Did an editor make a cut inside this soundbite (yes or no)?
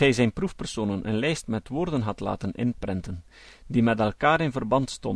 no